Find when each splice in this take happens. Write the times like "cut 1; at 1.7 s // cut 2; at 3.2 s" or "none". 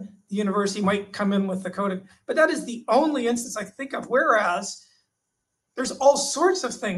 none